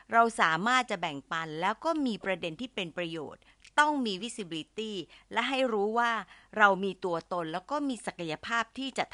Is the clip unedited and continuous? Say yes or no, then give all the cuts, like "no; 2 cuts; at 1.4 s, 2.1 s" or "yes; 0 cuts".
yes; 0 cuts